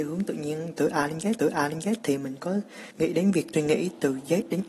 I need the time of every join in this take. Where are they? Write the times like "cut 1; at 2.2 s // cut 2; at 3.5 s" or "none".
cut 1; at 1.4 s // cut 2; at 2.9 s // cut 3; at 3.5 s